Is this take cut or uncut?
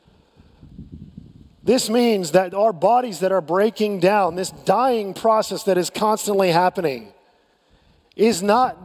uncut